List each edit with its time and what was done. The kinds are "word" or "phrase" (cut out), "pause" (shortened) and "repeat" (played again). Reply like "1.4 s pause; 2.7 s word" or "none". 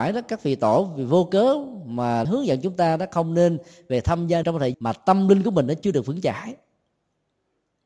2.2 s word; 4.4 s word; 4.7 s word